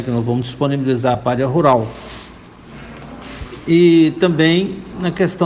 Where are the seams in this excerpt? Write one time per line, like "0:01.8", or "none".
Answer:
none